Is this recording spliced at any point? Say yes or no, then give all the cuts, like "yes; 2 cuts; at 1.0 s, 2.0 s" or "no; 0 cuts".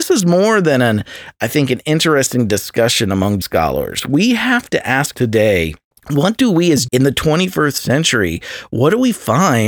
yes; 4 cuts; at 3.4 s, 5.1 s, 5.9 s, 6.9 s